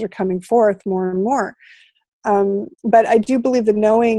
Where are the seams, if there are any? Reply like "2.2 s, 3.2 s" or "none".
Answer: 2.7 s